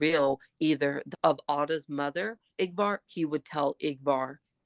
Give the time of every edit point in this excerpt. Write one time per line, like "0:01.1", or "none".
0:01.1
0:02.5
0:03.0